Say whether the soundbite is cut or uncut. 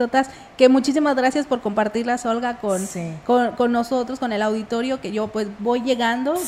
uncut